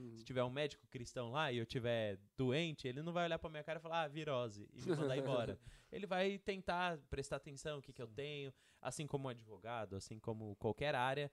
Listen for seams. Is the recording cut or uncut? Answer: uncut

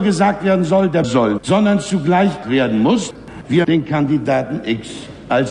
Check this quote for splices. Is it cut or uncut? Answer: cut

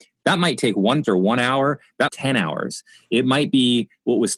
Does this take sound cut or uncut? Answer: cut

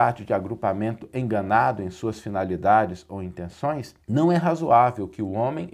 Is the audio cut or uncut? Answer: cut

